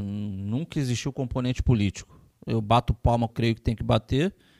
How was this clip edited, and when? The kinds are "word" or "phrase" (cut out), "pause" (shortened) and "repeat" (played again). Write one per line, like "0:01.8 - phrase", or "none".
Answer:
0:03.3 - phrase